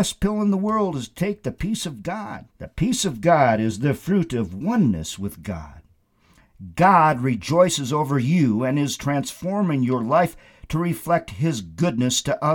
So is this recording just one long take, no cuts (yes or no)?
no